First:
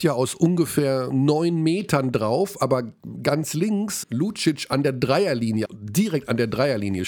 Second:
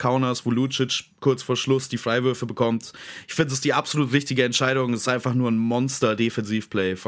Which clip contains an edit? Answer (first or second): first